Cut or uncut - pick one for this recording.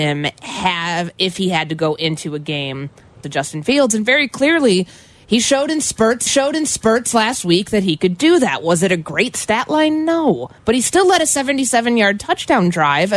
cut